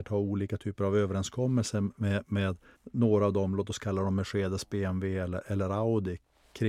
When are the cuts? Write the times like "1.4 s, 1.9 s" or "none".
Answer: 2.7 s